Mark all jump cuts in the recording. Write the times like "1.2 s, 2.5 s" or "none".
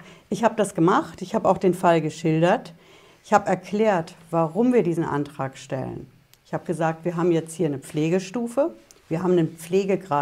none

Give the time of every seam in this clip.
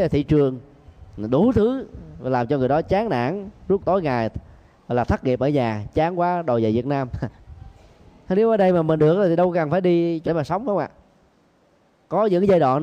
1.1 s, 3.8 s, 9.0 s, 10.3 s

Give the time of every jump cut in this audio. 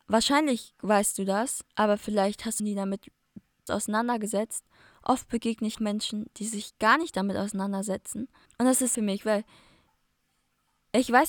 1.7 s, 2.6 s, 3.7 s, 5.7 s, 8.5 s, 8.9 s

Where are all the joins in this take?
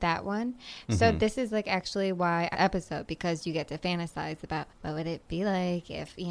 2.5 s, 4.7 s

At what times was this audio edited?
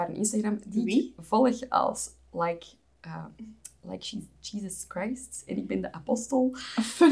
none

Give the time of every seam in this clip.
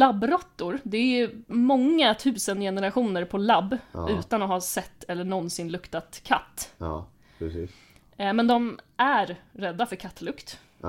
none

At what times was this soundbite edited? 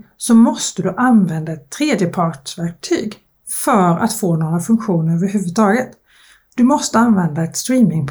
none

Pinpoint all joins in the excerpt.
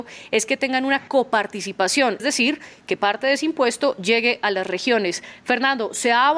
2.2 s

